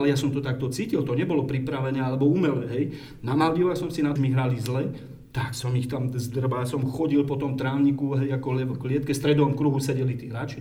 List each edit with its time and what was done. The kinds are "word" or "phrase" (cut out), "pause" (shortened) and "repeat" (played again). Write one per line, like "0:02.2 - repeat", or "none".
0:04.2 - phrase